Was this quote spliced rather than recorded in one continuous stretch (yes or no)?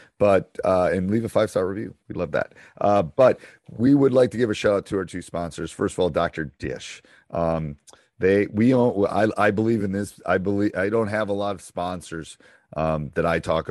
no